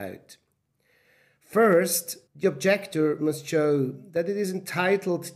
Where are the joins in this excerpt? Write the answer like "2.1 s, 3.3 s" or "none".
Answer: 2.3 s

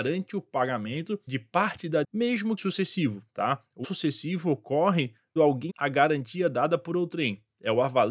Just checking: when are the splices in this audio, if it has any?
1.3 s, 2.0 s, 2.6 s, 3.8 s, 5.4 s, 5.7 s

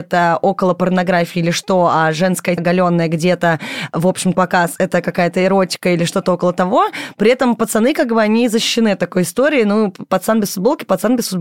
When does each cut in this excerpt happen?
2.6 s, 4.3 s

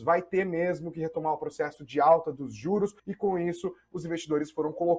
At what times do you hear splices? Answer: 3.0 s

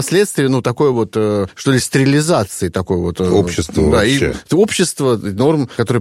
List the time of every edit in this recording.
none

